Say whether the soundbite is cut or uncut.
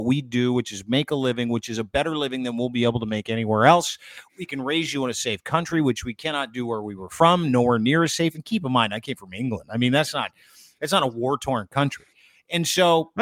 uncut